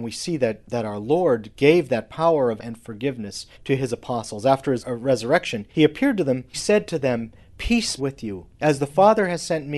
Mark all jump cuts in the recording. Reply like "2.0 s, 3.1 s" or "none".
2.6 s, 3.5 s, 4.8 s, 5.7 s, 6.5 s, 8.0 s, 8.5 s